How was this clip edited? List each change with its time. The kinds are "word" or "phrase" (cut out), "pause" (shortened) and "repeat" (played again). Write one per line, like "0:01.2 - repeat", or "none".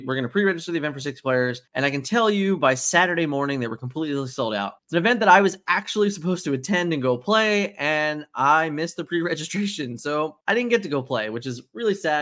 0:01.7 - pause
0:04.8 - pause
0:10.4 - pause